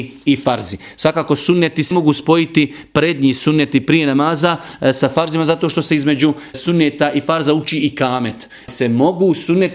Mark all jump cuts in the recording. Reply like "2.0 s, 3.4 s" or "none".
1.9 s, 6.5 s, 8.7 s